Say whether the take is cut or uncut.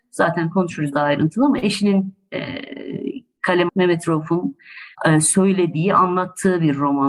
cut